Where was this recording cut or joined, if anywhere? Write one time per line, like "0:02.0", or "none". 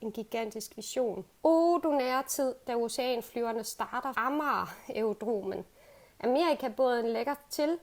0:01.4
0:04.1